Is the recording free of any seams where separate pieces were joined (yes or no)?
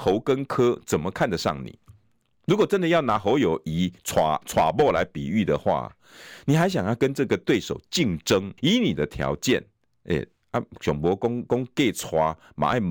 no